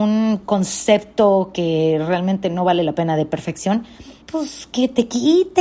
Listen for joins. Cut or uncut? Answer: cut